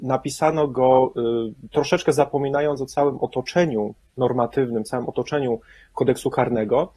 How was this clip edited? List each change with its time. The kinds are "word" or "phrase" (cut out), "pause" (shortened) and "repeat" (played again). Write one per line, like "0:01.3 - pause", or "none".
none